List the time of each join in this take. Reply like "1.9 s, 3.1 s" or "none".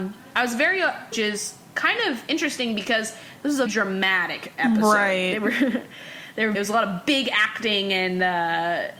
1.1 s, 3.7 s, 6.5 s